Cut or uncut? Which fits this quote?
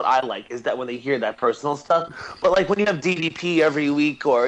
uncut